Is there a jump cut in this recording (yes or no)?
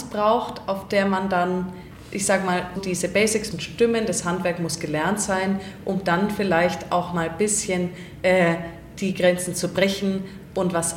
yes